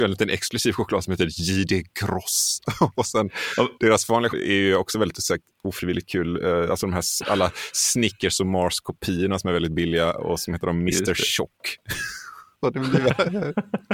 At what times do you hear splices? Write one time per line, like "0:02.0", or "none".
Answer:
0:03.8
0:04.3

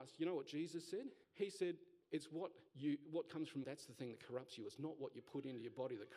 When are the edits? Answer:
0:01.2
0:02.0
0:02.7
0:03.6

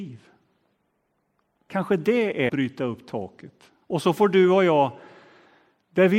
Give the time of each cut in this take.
0:02.5
0:03.8

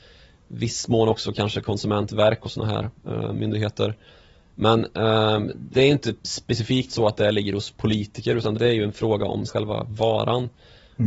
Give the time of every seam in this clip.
0:05.7
0:06.2
0:08.5
0:09.5

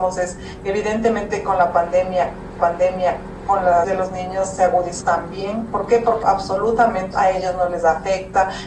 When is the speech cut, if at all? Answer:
0:02.6
0:03.8
0:05.0
0:06.2
0:07.1

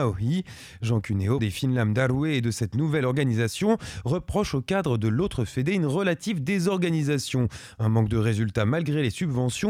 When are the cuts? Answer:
0:01.4

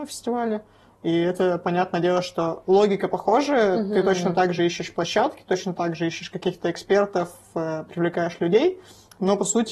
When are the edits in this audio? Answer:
none

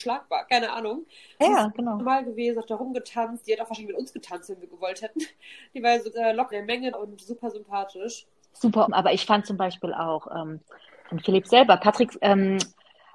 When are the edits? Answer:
0:01.4
0:06.1
0:06.5
0:06.9
0:08.9

